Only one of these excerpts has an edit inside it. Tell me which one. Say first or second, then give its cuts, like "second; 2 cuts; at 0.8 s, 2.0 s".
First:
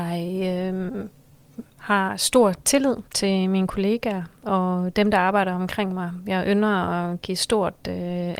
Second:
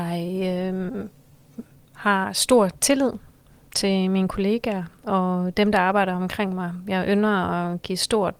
first; 2 cuts; at 1.7 s, 3.1 s